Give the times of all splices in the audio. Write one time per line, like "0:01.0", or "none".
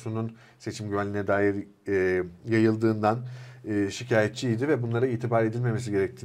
none